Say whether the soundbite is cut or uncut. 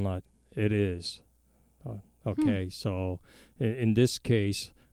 uncut